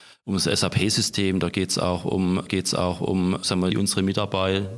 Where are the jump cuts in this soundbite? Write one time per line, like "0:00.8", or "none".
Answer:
0:02.5
0:03.7